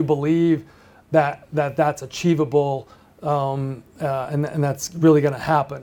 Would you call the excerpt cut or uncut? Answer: cut